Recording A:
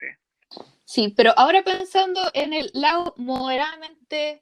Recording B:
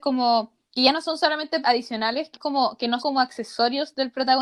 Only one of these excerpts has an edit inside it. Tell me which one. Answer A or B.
B